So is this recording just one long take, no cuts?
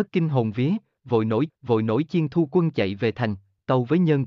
no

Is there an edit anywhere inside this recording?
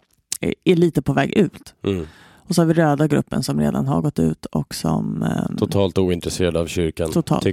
no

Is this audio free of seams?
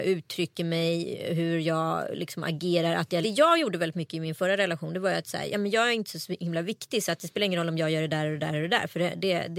no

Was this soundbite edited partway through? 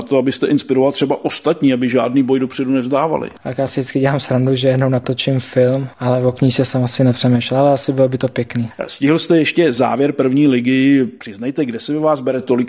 no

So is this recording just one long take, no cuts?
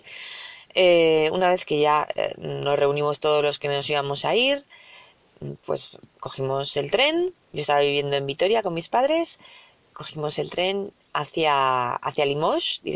no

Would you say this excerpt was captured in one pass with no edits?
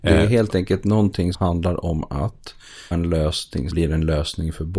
no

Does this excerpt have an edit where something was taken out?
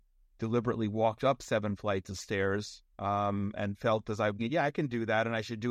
yes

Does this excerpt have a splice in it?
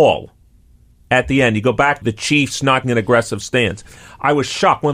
yes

